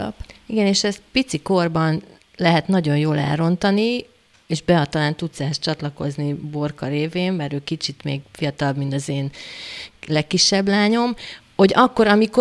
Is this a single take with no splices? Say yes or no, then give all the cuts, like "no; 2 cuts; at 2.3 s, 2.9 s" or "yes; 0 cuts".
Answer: no; 2 cuts; at 1.1 s, 11.4 s